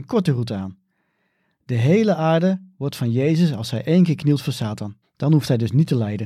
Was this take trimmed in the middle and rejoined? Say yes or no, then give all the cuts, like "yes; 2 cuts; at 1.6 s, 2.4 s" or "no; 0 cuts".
yes; 1 cut; at 5.0 s